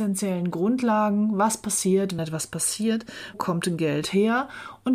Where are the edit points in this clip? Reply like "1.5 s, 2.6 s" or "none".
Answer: 2.2 s, 3.3 s